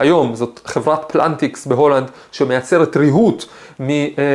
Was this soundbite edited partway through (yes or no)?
no